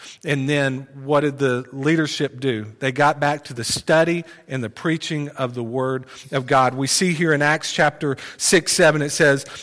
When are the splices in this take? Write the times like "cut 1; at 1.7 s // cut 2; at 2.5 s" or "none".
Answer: none